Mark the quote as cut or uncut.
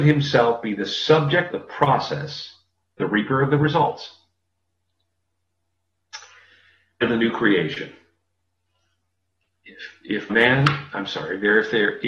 cut